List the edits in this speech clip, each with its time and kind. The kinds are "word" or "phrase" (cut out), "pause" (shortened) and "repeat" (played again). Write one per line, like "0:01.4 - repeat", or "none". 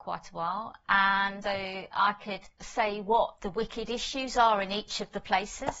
0:01.4 - word